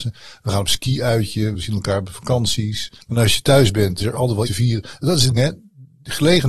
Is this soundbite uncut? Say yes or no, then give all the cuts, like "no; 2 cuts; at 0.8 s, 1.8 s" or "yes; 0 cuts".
no; 5 cuts; at 1.5 s, 3.0 s, 4.0 s, 4.5 s, 5.4 s